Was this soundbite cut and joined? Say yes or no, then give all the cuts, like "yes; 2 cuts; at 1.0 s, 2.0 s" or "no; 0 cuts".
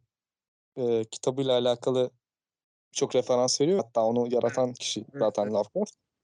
yes; 1 cut; at 3.8 s